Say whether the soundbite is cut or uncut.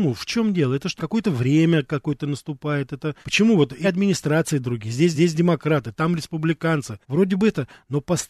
cut